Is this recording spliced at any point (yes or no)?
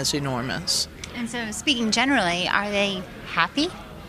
no